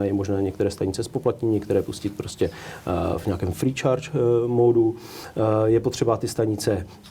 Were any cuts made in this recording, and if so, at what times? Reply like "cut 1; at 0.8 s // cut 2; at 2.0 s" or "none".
none